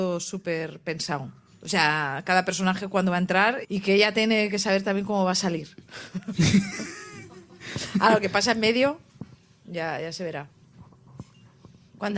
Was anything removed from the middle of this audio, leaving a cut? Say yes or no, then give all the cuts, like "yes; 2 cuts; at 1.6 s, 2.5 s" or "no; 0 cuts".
yes; 1 cut; at 3.6 s